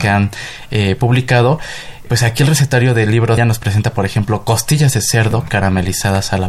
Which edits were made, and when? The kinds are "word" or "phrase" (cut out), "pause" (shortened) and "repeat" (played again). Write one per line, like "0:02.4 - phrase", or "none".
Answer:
0:02.1 - word
0:03.4 - phrase